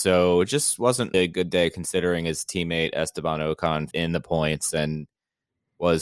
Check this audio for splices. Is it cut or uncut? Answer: cut